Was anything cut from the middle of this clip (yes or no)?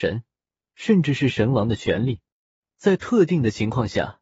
no